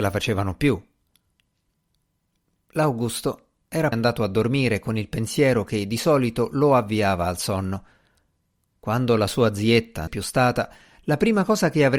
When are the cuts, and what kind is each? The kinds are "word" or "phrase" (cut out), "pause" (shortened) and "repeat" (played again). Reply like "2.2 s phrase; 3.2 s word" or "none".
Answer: 3.9 s word; 10.1 s phrase